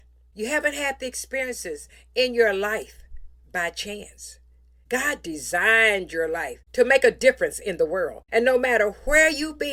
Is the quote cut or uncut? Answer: uncut